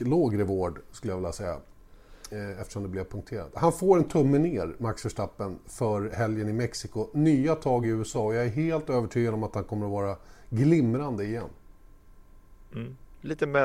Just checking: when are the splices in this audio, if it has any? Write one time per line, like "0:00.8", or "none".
none